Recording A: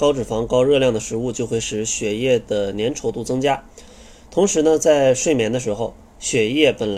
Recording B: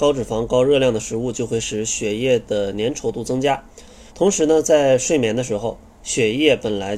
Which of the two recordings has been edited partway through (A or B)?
B